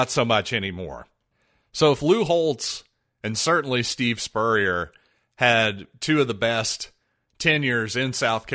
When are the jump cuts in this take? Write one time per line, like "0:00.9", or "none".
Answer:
none